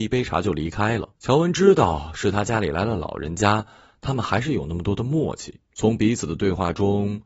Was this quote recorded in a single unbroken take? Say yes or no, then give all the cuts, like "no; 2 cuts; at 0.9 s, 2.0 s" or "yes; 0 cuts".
no; 2 cuts; at 1.2 s, 5.7 s